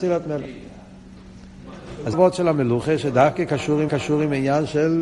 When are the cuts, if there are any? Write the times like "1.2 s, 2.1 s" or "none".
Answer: 2.1 s, 3.9 s